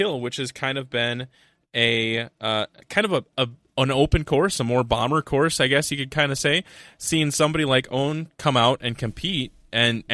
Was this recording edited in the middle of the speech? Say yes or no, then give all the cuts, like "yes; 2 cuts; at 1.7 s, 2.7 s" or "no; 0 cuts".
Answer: no; 0 cuts